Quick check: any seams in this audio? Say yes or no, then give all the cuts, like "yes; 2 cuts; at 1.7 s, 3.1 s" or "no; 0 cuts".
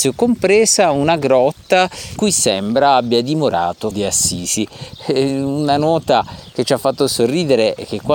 yes; 2 cuts; at 2.2 s, 3.9 s